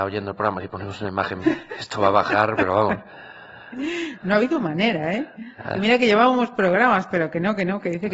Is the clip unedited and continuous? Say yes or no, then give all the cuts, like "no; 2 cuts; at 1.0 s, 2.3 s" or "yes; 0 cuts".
no; 1 cut; at 1.4 s